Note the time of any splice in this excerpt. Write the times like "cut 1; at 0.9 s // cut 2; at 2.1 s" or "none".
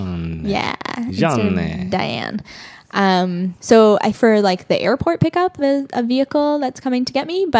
cut 1; at 3.6 s // cut 2; at 4.1 s // cut 3; at 5.6 s